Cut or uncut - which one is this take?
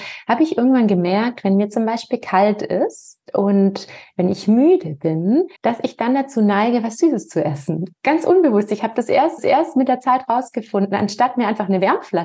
cut